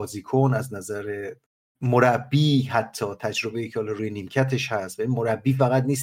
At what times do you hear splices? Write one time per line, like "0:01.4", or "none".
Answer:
0:01.5